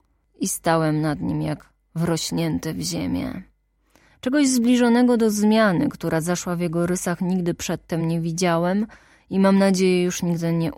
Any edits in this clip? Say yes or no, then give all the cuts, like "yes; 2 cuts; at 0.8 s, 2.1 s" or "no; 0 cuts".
no; 0 cuts